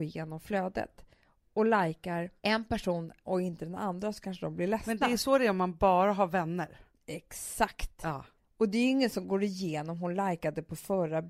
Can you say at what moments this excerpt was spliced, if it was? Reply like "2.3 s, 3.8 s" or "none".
2.4 s, 8.4 s